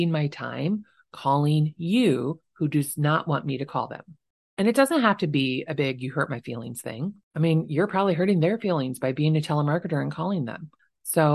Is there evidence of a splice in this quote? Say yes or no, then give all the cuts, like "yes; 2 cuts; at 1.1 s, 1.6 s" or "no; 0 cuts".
no; 0 cuts